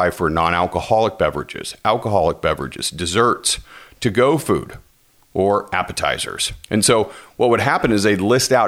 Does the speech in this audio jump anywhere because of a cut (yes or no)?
yes